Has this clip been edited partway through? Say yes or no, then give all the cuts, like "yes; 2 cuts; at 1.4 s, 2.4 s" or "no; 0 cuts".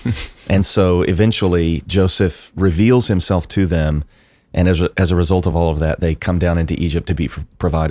no; 0 cuts